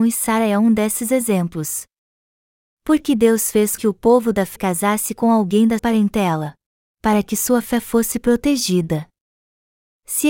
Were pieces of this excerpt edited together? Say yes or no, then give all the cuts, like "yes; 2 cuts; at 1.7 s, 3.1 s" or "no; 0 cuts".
yes; 4 cuts; at 3.8 s, 4.6 s, 5.8 s, 6.8 s